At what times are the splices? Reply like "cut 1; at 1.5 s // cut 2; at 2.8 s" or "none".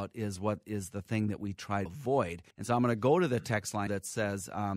cut 1; at 1.9 s // cut 2; at 2.5 s // cut 3; at 3.9 s